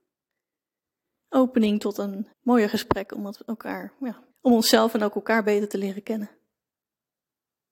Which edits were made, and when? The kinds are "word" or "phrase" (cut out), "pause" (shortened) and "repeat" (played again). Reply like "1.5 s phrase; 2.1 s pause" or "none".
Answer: 2.3 s pause; 4.3 s pause